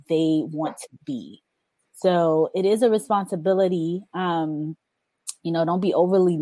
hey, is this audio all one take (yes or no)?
yes